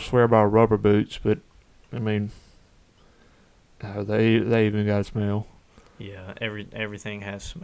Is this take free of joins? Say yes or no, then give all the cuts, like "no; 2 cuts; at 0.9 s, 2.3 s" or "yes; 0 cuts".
yes; 0 cuts